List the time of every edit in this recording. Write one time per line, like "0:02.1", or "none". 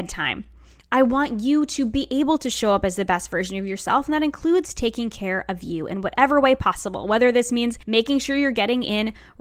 0:07.8